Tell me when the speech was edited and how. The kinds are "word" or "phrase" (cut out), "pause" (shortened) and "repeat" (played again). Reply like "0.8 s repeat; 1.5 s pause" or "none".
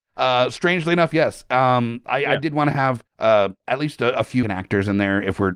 3.1 s pause; 4.4 s word